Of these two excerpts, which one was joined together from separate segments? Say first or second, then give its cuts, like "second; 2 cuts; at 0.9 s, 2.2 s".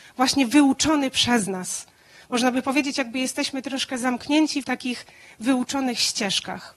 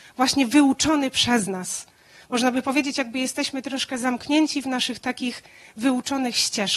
first; 1 cut; at 4.6 s